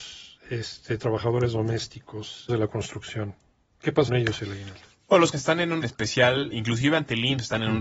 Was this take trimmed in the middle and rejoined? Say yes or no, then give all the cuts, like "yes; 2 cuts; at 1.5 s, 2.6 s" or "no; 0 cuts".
yes; 6 cuts; at 1.0 s, 2.5 s, 4.1 s, 5.3 s, 5.8 s, 6.5 s